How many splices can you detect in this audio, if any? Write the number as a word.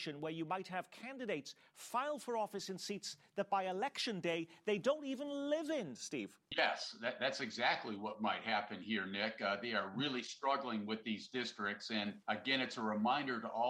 two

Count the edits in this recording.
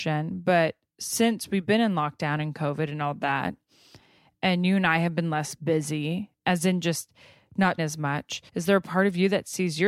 three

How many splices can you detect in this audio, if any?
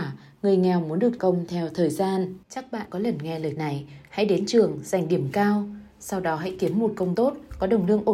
five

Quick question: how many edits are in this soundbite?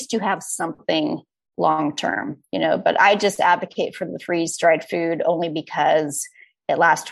zero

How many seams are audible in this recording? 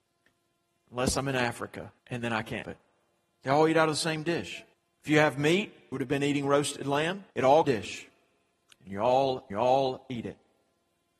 seven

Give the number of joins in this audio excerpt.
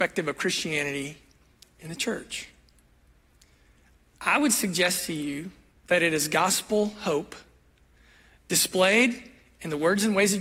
zero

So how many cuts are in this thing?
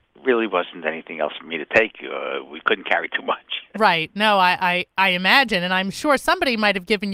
zero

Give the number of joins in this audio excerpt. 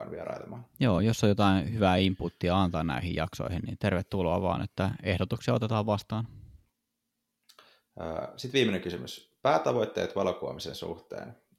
zero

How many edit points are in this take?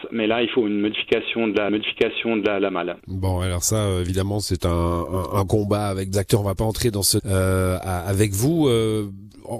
four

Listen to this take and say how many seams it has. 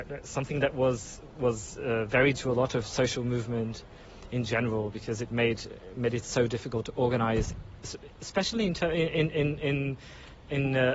one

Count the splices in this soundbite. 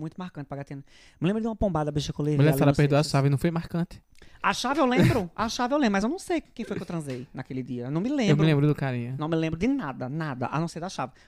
zero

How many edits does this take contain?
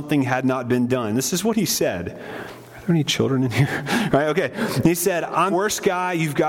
one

